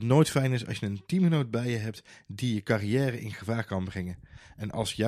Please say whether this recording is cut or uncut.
uncut